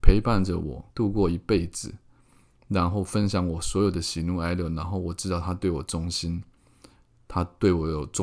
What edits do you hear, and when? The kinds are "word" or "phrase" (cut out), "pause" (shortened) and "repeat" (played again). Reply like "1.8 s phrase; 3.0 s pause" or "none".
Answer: 0.9 s pause

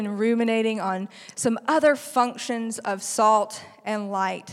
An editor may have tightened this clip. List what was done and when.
none

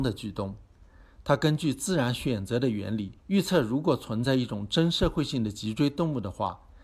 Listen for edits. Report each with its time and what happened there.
3.2 s pause

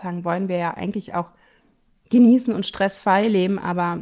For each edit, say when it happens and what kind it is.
none

